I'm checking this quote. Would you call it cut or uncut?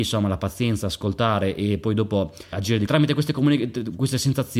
cut